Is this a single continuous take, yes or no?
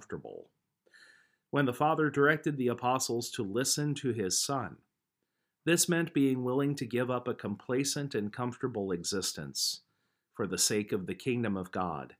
yes